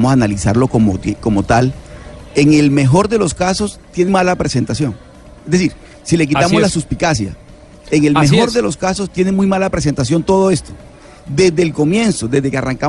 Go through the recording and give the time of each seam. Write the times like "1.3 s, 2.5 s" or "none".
4.1 s